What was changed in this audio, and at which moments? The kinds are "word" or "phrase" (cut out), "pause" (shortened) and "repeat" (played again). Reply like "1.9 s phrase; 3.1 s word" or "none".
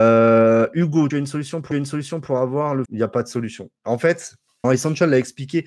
1.1 s word; 1.7 s repeat; 2.8 s phrase; 4.6 s word